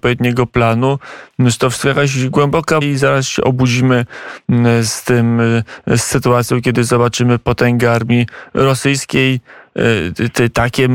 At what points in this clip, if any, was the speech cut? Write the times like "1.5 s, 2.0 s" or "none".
2.8 s